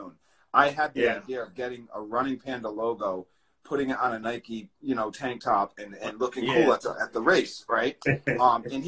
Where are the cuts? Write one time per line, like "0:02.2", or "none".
none